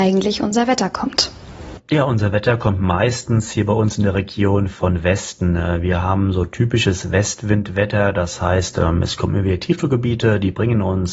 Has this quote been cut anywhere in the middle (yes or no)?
no